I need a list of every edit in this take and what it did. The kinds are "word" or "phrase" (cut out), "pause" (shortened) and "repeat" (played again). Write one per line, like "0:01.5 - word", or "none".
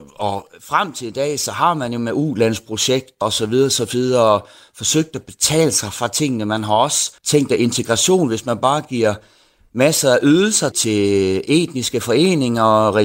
0:03.2 - word
0:07.2 - pause
0:10.7 - word